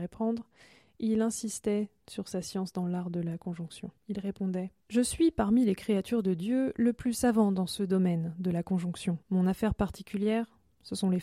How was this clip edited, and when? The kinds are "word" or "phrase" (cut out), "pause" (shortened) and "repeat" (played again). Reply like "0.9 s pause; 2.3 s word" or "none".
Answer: 4.0 s pause; 4.8 s pause; 9.2 s pause